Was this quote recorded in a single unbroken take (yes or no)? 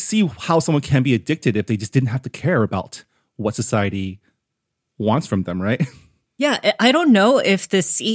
yes